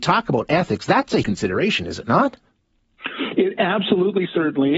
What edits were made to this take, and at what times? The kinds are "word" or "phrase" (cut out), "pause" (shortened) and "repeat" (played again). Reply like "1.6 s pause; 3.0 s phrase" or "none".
1.2 s word